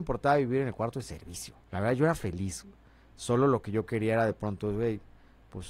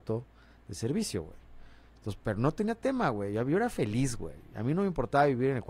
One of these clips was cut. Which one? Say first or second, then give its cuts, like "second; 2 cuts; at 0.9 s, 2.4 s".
first; 1 cut; at 1.6 s